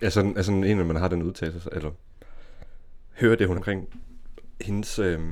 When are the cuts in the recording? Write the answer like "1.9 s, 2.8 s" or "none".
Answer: 3.5 s